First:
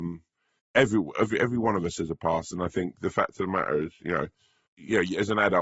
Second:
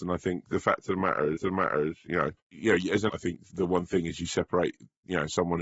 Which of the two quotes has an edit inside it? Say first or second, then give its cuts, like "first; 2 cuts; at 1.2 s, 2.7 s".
second; 4 cuts; at 1.4 s, 2.4 s, 3.1 s, 3.5 s